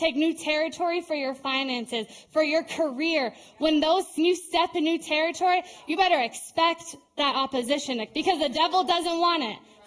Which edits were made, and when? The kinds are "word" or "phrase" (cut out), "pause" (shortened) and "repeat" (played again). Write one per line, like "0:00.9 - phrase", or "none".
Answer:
0:04.2 - word
0:04.7 - word
0:08.1 - word